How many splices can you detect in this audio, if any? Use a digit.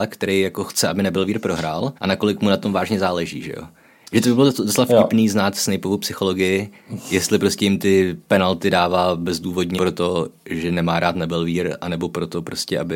2